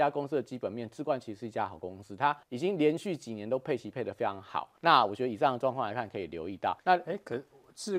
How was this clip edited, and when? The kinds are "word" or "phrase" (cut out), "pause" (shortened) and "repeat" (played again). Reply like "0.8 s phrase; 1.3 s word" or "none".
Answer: 2.4 s pause; 4.8 s pause; 6.8 s pause